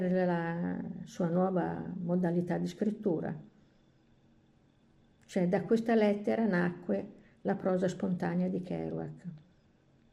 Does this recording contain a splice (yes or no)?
no